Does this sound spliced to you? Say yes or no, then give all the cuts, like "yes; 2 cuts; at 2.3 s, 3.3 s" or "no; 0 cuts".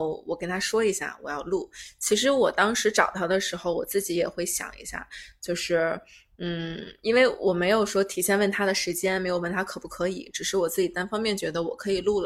no; 0 cuts